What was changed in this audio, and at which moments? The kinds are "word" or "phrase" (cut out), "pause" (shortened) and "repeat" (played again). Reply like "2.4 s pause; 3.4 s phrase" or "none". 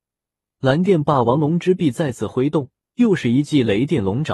2.8 s pause